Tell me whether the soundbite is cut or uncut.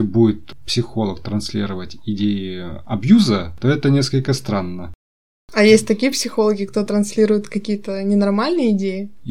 uncut